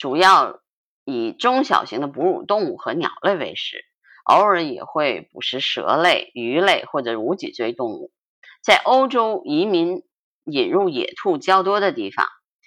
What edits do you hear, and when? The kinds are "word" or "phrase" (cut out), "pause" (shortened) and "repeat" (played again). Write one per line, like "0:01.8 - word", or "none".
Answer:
none